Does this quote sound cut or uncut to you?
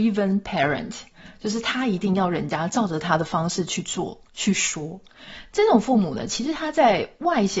uncut